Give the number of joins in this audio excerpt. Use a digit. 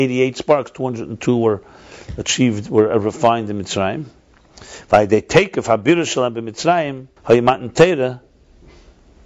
1